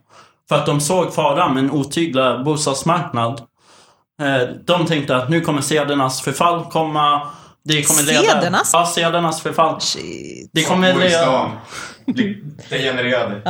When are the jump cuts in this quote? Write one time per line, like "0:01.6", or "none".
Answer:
none